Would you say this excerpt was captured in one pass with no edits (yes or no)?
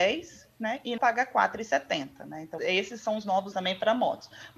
no